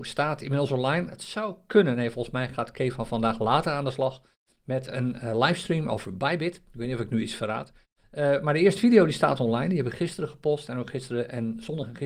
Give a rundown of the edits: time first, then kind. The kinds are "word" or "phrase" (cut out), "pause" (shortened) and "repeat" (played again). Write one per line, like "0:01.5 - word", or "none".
none